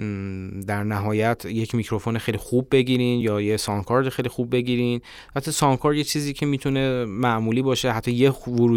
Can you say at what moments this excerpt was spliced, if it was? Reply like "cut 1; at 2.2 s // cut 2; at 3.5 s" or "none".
none

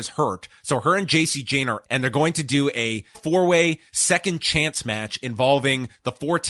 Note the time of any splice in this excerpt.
cut 1; at 1.8 s // cut 2; at 3.1 s

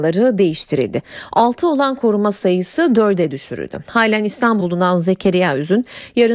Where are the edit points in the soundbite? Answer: cut 1; at 4.6 s

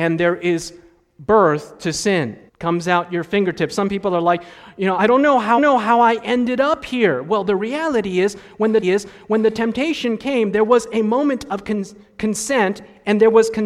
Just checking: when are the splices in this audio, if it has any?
cut 1; at 2.5 s // cut 2; at 5.0 s // cut 3; at 5.6 s // cut 4; at 8.8 s

